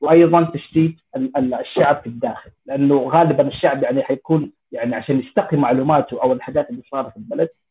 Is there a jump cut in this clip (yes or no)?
yes